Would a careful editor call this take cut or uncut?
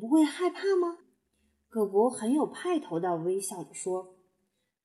cut